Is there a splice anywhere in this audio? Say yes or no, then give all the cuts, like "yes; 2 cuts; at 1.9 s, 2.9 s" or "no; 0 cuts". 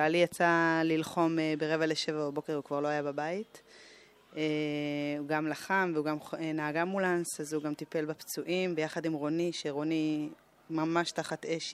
no; 0 cuts